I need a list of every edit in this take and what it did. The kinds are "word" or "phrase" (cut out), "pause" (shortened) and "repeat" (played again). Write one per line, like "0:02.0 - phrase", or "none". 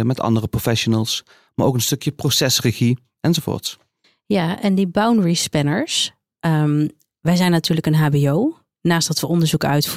0:04.0 - pause